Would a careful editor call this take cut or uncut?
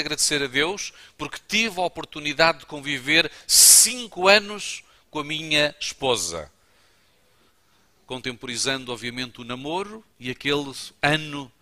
uncut